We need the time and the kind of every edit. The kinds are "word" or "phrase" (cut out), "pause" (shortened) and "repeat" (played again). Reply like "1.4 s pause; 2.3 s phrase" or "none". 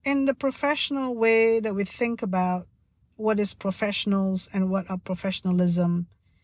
none